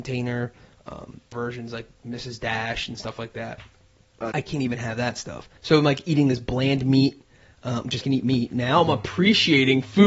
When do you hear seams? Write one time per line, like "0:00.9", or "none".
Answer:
0:01.3
0:04.3
0:05.6
0:08.0